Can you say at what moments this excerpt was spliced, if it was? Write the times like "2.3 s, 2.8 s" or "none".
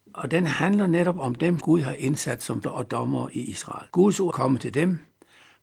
1.6 s, 2.6 s, 3.9 s, 4.3 s